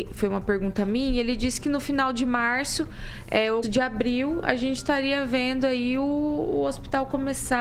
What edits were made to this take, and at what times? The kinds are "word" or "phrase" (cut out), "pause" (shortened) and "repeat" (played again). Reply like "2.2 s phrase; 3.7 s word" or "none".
3.6 s word